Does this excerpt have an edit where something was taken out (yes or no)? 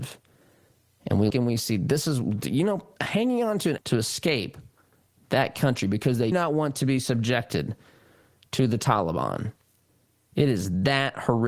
yes